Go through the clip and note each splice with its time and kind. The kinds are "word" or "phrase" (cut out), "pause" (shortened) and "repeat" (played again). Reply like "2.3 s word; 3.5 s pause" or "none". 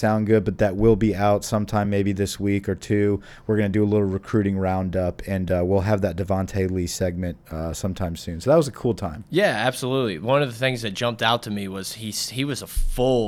none